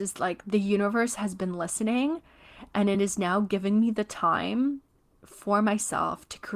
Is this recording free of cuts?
yes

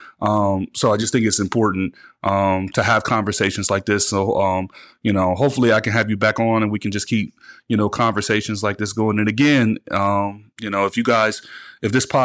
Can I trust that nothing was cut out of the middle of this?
yes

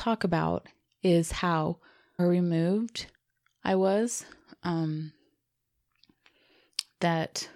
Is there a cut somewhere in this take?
yes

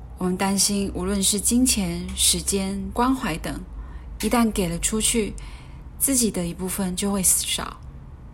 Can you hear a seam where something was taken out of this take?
yes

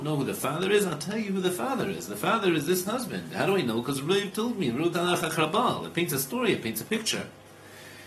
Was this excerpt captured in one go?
no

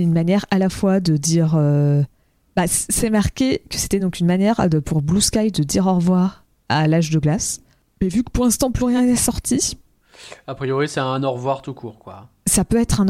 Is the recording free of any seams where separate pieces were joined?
yes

